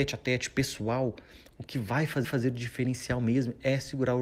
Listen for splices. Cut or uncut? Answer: cut